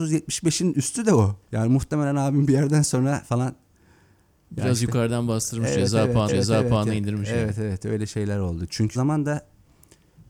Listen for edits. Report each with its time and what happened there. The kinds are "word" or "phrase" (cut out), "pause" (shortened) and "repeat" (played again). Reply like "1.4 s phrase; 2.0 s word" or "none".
1.4 s pause; 6.3 s repeat; 8.9 s word